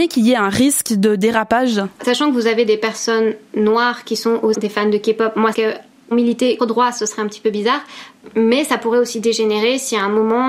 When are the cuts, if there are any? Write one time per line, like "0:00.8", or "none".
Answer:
0:02.0
0:04.5
0:05.5
0:06.1
0:06.6